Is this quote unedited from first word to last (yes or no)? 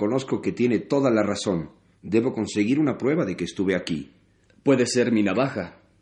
yes